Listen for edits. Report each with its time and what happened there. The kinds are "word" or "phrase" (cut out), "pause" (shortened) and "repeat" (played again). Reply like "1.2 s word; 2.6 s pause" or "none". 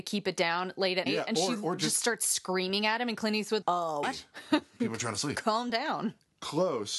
1.1 s word; 3.6 s word; 4.0 s word